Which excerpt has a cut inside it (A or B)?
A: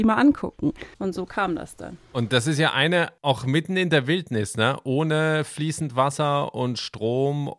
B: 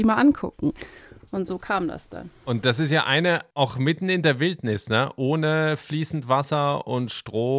A